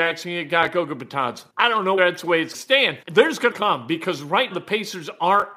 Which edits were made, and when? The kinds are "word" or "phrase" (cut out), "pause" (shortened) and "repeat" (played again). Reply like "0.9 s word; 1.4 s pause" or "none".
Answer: 1.5 s pause; 2.0 s word; 2.5 s phrase; 3.0 s pause; 3.5 s phrase; 4.5 s word